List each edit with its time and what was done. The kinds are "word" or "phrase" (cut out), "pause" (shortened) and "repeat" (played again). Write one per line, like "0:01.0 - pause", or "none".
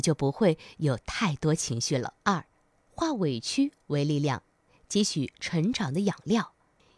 0:02.2 - pause